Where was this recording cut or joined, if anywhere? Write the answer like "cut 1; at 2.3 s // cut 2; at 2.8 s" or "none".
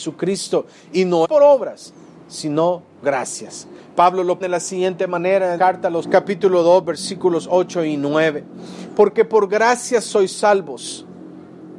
cut 1; at 1.2 s // cut 2; at 3.0 s // cut 3; at 4.4 s // cut 4; at 5.6 s // cut 5; at 6.0 s